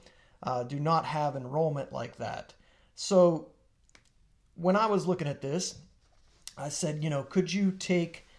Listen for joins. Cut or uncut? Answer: uncut